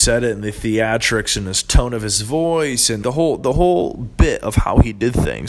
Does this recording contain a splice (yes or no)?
yes